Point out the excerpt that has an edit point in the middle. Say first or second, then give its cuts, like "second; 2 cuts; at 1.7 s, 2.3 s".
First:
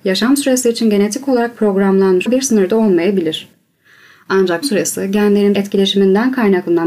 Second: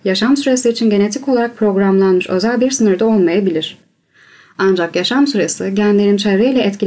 first; 3 cuts; at 2.3 s, 4.6 s, 5.5 s